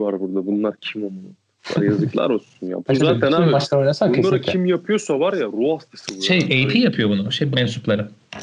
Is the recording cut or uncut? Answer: cut